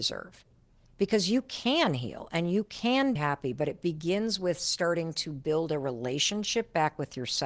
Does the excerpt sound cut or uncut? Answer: cut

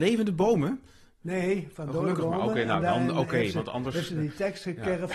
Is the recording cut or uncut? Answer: uncut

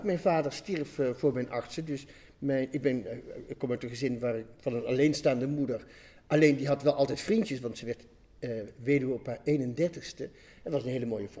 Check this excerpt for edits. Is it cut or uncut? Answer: uncut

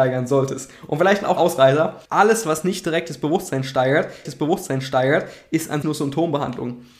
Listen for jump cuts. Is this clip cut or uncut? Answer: cut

